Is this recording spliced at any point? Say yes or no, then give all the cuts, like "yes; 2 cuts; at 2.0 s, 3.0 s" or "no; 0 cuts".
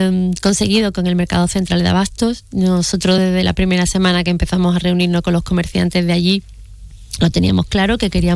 no; 0 cuts